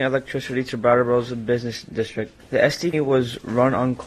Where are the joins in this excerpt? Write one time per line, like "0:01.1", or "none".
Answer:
0:02.9